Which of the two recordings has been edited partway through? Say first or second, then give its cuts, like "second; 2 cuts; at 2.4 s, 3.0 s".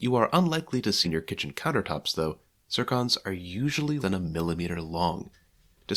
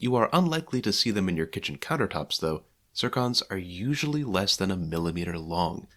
first; 2 cuts; at 1.0 s, 4.0 s